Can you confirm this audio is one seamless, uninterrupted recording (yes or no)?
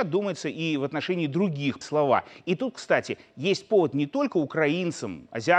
no